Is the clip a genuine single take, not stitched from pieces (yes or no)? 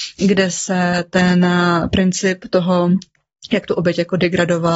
yes